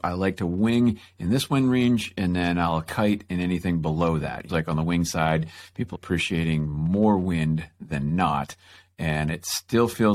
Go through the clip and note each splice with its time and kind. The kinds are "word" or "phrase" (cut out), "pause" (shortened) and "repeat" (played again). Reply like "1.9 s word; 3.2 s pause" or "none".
4.5 s phrase; 5.9 s phrase